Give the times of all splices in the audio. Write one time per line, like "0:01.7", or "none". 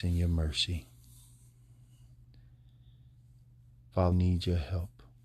0:04.1